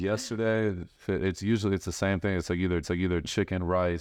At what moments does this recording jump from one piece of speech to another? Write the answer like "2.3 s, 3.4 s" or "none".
1.0 s, 2.8 s